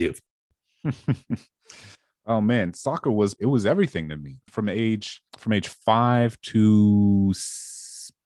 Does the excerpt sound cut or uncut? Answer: cut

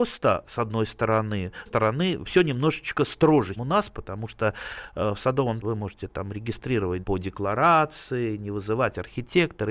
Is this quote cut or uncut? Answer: cut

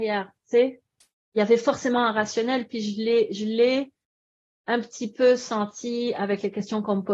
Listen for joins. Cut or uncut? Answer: uncut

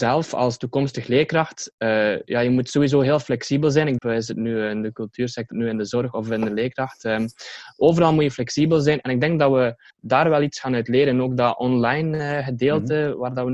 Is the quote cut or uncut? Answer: cut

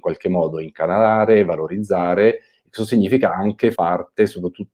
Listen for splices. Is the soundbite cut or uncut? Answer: cut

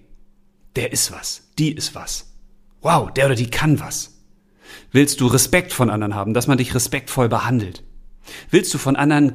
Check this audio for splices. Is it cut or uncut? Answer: uncut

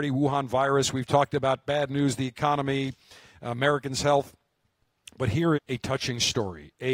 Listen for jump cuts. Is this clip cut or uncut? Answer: cut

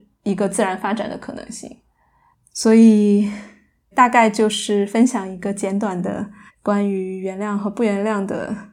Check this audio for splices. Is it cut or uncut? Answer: cut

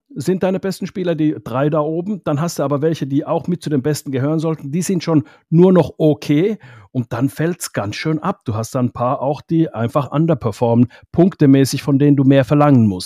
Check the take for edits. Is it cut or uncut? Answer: uncut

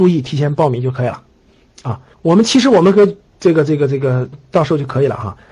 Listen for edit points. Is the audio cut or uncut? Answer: cut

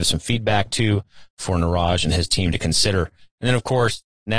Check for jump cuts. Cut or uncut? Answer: uncut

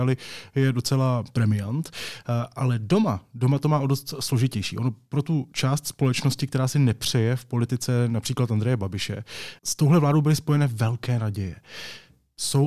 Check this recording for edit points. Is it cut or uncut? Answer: uncut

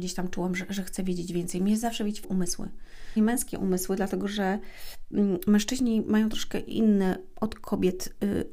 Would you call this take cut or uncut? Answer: cut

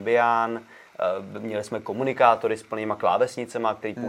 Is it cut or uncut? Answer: uncut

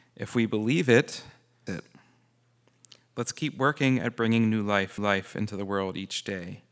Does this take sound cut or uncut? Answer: cut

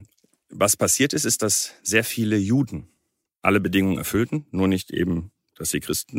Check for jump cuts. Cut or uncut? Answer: uncut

